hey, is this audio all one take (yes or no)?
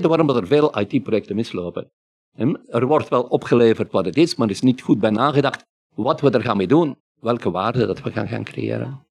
yes